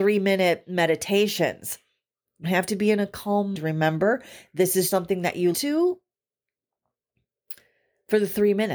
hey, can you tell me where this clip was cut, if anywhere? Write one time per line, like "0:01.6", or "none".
0:02.4
0:03.5
0:04.9
0:05.5